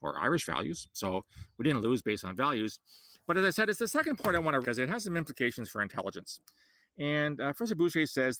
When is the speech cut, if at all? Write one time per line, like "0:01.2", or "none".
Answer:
0:04.6